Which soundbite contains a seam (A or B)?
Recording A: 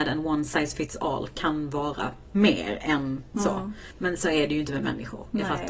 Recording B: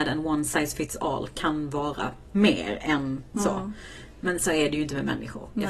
A